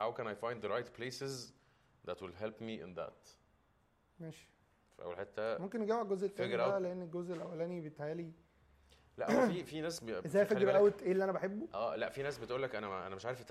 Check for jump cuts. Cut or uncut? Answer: uncut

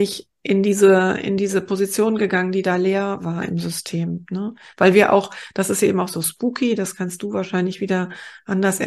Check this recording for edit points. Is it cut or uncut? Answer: uncut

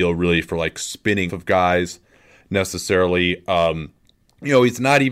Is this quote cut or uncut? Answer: cut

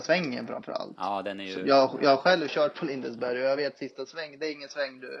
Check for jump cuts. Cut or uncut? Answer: uncut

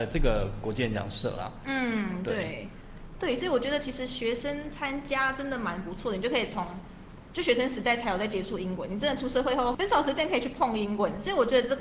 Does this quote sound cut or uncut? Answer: uncut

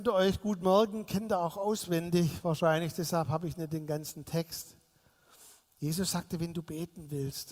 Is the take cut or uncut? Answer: uncut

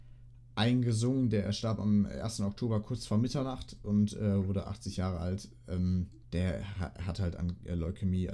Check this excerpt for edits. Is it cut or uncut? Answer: cut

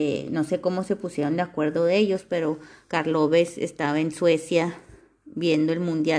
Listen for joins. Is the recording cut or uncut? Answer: uncut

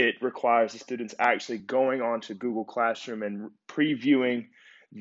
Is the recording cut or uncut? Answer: uncut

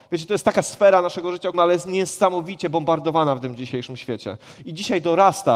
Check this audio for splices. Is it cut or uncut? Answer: cut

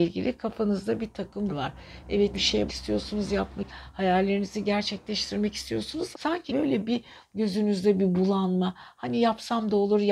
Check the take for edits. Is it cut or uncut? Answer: cut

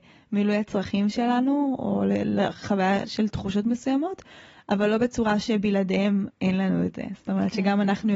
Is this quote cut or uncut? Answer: uncut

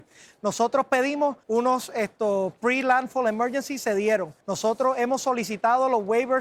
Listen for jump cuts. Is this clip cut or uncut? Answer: cut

